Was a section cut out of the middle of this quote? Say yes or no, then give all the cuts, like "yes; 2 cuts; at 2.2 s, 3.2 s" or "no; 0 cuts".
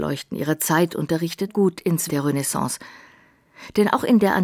yes; 2 cuts; at 1.5 s, 2.1 s